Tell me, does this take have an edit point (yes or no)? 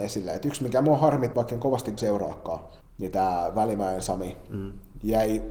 yes